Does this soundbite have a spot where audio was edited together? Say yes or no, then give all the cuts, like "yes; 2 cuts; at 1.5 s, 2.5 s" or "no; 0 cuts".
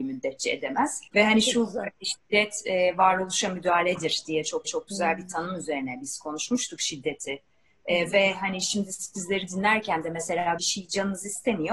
yes; 3 cuts; at 1.1 s, 4.7 s, 10.6 s